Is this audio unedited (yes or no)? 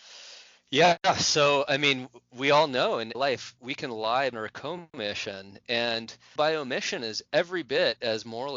no